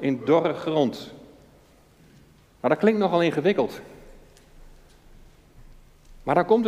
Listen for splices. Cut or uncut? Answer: uncut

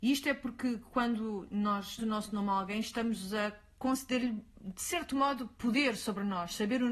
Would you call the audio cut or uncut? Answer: cut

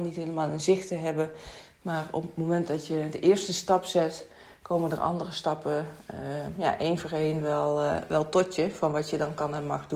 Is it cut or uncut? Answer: uncut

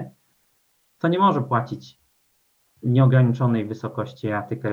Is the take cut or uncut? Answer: uncut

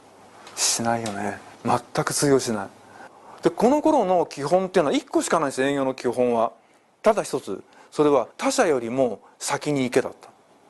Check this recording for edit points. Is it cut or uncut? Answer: cut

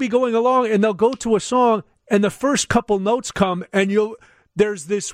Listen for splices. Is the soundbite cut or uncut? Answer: uncut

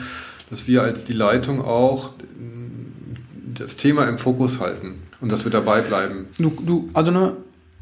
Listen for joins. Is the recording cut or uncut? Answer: cut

